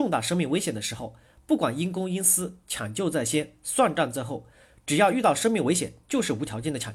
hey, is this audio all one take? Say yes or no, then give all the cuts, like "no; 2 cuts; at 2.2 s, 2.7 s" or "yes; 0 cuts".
yes; 0 cuts